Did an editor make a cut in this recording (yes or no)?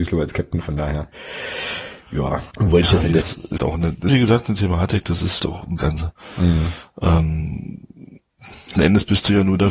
yes